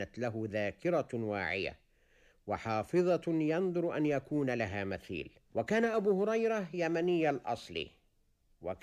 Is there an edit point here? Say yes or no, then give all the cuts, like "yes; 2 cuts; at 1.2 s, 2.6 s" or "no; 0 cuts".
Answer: yes; 1 cut; at 5.5 s